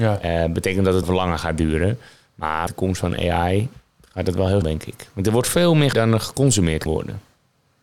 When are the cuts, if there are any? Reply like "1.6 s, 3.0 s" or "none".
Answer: 1.0 s, 2.7 s, 4.6 s, 5.9 s, 6.9 s